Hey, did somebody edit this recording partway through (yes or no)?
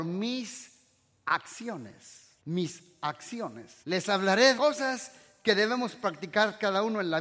yes